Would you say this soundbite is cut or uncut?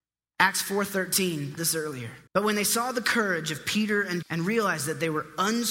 cut